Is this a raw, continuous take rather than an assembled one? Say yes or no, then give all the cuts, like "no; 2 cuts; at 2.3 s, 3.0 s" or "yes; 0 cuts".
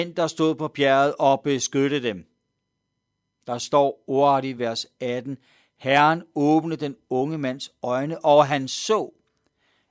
yes; 0 cuts